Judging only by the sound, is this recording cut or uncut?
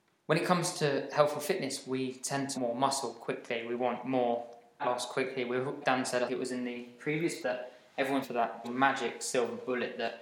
cut